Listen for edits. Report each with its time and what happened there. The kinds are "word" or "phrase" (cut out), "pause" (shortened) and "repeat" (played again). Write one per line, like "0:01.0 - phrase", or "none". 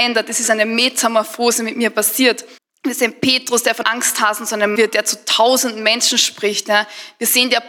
0:02.6 - pause
0:03.8 - word
0:04.8 - word